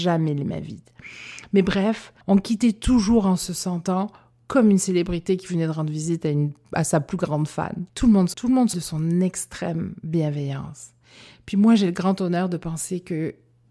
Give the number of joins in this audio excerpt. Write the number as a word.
four